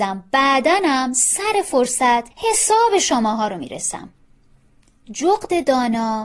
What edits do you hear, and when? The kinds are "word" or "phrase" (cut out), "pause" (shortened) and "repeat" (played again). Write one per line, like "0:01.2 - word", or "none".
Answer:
0:02.3 - pause